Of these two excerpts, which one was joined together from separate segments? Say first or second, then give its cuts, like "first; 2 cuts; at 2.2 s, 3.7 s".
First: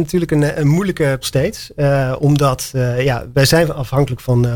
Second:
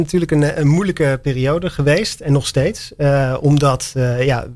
first; 1 cut; at 1.2 s